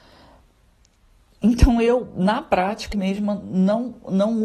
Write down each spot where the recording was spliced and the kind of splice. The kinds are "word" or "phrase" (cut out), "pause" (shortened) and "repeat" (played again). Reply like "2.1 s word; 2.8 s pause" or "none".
2.9 s word